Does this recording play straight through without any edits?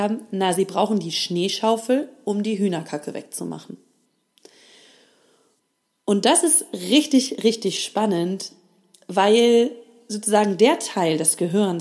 yes; 0 cuts

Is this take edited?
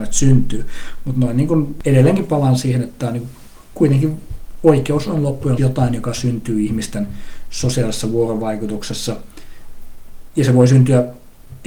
yes; 1 cut; at 5.6 s

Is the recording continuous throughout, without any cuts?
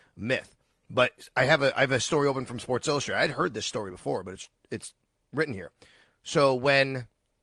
yes; 0 cuts

